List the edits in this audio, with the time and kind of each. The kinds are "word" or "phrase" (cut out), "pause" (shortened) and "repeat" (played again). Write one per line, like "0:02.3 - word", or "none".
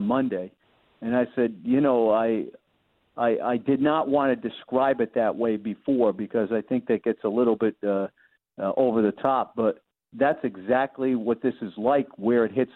none